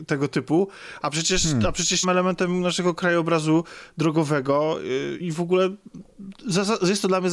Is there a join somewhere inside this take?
yes; 2 cuts; at 2.0 s, 5.2 s

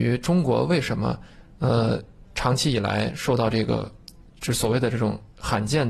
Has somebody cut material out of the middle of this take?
no; 0 cuts

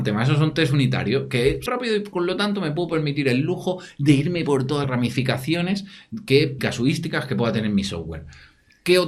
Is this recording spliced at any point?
yes; 3 cuts; at 1.7 s, 4.8 s, 6.6 s

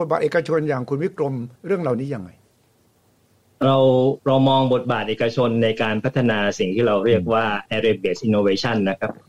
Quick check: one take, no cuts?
no; 1 cut; at 1.6 s

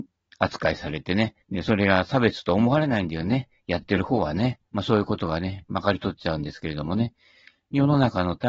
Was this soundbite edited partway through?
yes; 2 cuts; at 1.4 s, 4.7 s

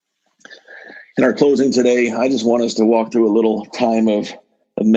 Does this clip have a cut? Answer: no; 0 cuts

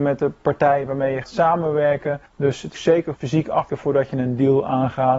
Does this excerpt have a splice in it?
yes; 5 cuts; at 1.2 s, 2.3 s, 2.7 s, 3.1 s, 3.7 s

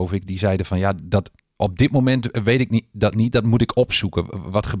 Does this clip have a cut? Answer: no; 0 cuts

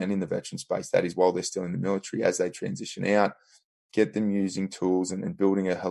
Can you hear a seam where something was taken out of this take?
no; 0 cuts

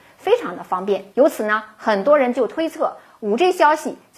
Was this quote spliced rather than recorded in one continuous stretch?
yes; 1 cut; at 1.1 s

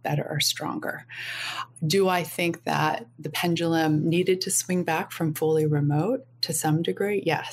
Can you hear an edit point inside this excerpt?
no; 0 cuts

